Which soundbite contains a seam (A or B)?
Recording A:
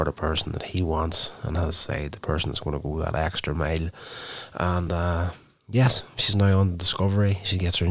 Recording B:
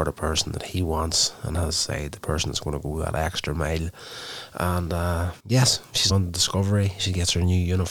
B